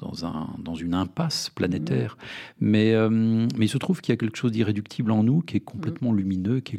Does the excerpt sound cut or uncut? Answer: uncut